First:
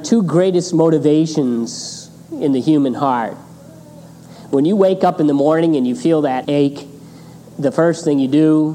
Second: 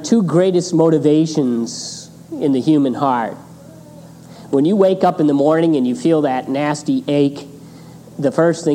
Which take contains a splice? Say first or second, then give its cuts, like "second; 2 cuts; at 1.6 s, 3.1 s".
first; 1 cut; at 6.4 s